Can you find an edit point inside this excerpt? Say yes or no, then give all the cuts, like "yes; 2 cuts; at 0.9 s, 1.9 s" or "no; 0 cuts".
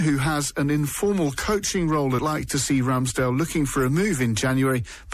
yes; 1 cut; at 2.2 s